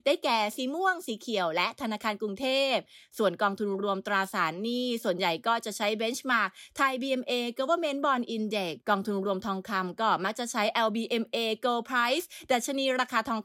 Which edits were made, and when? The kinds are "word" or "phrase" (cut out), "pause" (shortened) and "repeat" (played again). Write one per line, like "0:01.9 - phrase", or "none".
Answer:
0:08.8 - pause